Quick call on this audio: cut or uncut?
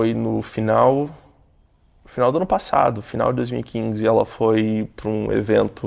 uncut